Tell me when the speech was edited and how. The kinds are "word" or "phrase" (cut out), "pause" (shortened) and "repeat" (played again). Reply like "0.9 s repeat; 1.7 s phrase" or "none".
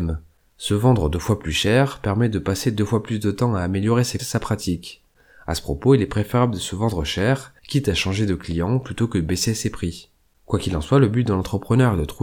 4.2 s word; 7.6 s pause